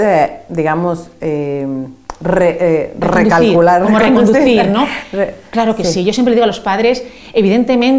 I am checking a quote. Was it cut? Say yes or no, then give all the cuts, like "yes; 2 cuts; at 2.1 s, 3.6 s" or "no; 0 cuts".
no; 0 cuts